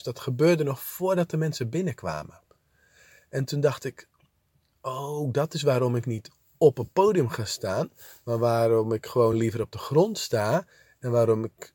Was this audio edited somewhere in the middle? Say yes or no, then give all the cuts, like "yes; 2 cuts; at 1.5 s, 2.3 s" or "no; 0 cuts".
no; 0 cuts